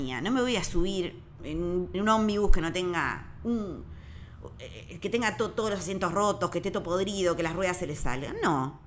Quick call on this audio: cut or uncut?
cut